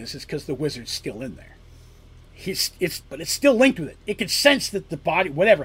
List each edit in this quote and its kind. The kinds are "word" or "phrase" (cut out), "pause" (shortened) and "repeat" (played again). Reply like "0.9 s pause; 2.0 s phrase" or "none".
2.2 s pause; 3.0 s word